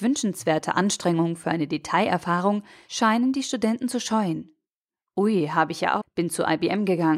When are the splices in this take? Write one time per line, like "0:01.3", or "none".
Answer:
0:06.0